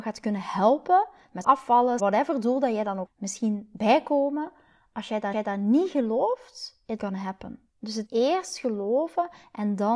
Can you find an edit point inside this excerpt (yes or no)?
yes